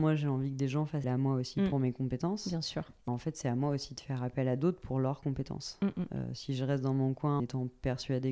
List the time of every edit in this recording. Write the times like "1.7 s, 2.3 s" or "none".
1.0 s, 3.1 s, 7.4 s